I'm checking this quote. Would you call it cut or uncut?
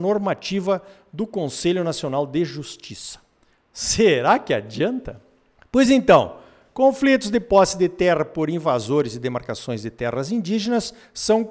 uncut